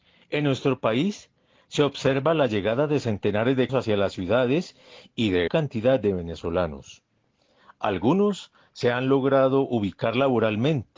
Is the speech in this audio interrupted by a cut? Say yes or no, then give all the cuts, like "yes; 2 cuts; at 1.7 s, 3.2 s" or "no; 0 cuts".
yes; 2 cuts; at 3.7 s, 5.5 s